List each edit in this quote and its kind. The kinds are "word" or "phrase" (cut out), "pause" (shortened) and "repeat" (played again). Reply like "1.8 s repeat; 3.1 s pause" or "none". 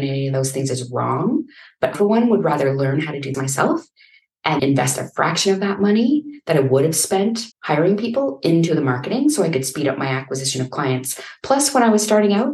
1.9 s word; 3.3 s word; 4.6 s word; 7.5 s pause